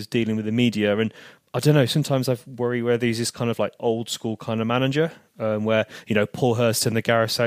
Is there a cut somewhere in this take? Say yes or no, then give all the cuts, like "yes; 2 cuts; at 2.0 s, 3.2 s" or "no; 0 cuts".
no; 0 cuts